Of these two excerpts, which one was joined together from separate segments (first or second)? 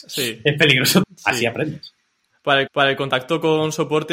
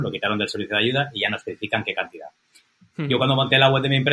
first